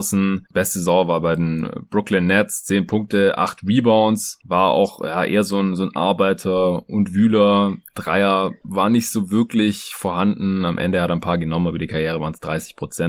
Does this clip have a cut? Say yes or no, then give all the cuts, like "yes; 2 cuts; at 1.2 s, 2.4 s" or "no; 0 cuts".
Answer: no; 0 cuts